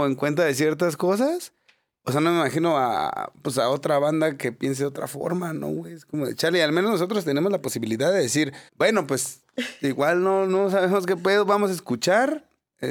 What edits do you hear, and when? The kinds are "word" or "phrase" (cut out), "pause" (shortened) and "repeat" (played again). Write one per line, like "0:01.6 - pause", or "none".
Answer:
0:08.7 - pause